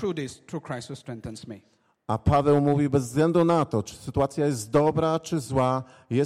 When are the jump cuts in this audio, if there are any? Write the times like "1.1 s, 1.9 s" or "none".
none